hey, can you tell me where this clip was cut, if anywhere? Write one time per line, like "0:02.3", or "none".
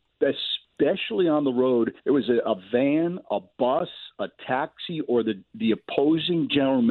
0:02.0